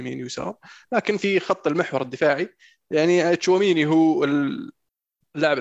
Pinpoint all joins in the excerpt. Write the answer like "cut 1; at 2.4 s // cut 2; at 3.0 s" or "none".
none